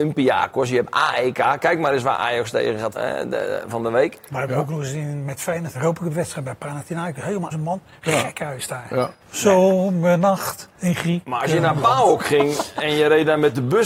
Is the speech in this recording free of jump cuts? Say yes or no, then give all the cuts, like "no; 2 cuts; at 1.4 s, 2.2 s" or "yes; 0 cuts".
no; 4 cuts; at 2.9 s, 5.7 s, 7.5 s, 9.2 s